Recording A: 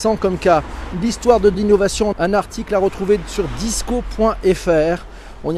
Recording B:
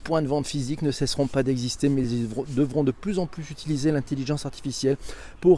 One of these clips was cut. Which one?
A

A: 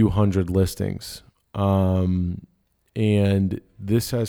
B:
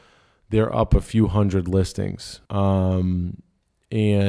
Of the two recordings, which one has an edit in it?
B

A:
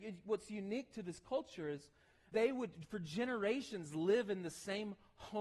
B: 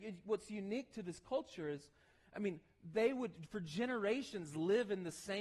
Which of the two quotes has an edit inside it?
A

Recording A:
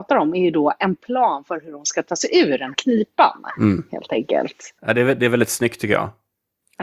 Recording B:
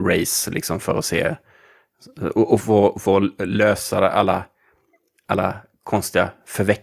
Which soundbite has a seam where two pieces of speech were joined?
A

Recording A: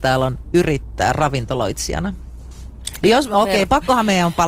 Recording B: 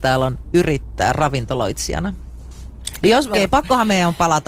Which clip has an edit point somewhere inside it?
B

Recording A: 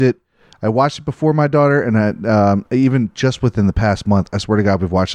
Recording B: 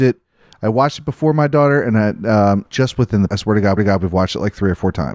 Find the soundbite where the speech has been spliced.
B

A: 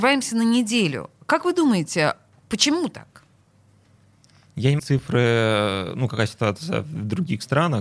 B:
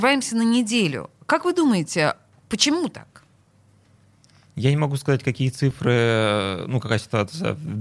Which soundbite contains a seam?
A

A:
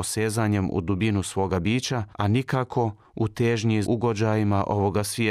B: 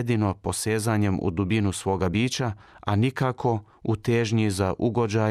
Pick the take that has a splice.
A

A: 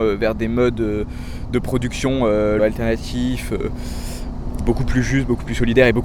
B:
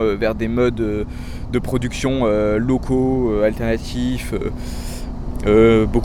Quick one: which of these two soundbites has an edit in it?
A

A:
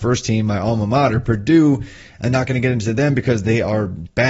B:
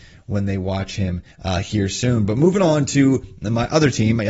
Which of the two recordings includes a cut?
B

